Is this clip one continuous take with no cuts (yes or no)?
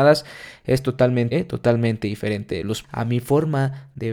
no